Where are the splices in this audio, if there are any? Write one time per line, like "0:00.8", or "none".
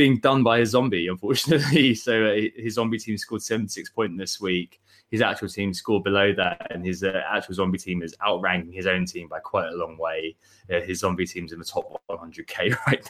none